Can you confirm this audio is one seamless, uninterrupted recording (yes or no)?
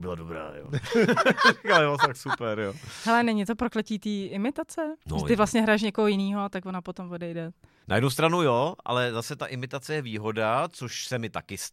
yes